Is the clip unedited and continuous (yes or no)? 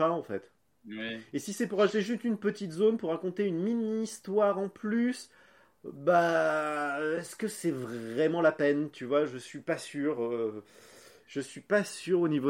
yes